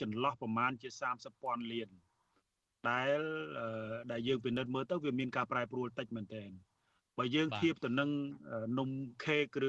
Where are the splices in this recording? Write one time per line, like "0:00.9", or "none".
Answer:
none